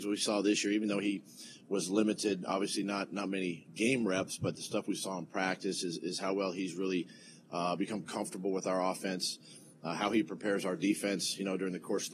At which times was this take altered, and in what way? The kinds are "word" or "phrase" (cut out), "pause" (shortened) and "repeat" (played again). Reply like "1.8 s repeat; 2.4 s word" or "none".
none